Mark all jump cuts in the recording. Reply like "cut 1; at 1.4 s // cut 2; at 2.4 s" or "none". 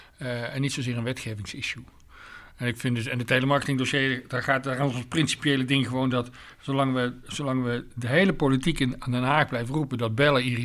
none